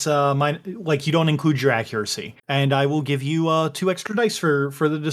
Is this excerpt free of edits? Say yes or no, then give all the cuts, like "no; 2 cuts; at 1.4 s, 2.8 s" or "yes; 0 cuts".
no; 1 cut; at 2.4 s